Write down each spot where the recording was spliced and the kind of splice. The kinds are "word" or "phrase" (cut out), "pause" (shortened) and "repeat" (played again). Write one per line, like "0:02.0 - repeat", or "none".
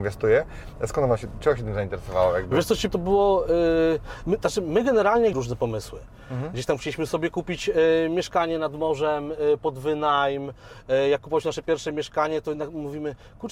0:02.9 - word
0:05.3 - phrase